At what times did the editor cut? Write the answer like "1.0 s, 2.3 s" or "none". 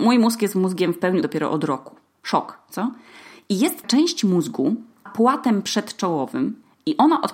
1.2 s, 3.8 s, 5.1 s